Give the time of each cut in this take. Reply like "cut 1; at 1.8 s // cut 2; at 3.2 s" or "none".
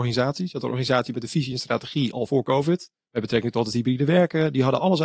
none